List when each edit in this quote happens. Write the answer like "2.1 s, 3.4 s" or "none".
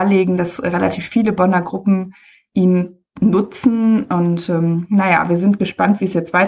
none